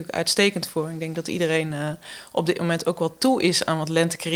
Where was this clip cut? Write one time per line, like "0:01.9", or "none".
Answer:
none

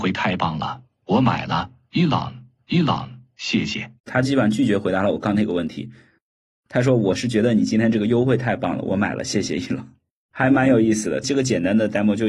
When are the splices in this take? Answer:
0:02.6
0:04.0

